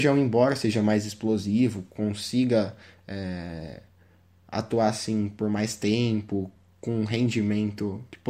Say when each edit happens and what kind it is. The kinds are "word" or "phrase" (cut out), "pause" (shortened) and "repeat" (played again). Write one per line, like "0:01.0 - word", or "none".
none